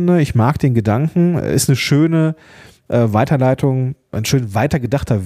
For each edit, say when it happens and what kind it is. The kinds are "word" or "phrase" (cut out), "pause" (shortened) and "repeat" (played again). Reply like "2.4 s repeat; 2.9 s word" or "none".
4.1 s word